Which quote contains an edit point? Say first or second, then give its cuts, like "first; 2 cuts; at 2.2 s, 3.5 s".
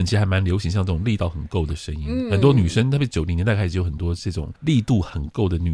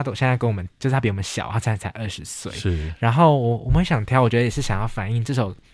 first; 1 cut; at 4.6 s